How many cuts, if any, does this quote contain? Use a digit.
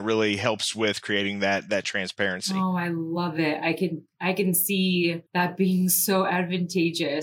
1